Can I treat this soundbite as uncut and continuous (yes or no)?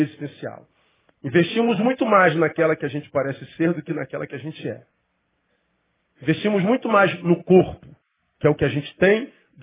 yes